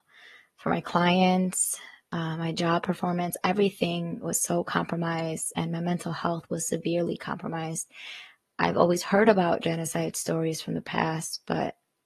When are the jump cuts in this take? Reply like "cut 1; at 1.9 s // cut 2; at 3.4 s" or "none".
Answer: none